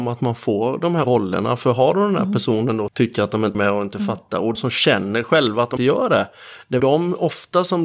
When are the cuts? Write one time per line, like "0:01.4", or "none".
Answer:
0:01.0
0:02.9
0:03.5
0:04.5
0:05.8
0:06.8